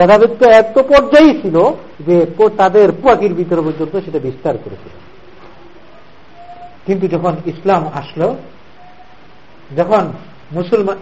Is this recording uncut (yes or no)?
no